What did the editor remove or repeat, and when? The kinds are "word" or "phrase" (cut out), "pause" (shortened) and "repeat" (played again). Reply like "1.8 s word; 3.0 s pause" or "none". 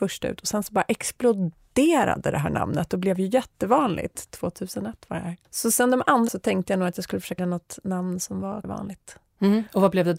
5.4 s pause; 6.3 s word; 7.4 s word; 8.6 s phrase